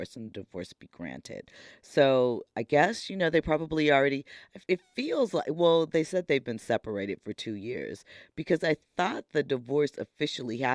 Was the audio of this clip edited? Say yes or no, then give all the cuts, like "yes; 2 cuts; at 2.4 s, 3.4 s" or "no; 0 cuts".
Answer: yes; 1 cut; at 4.6 s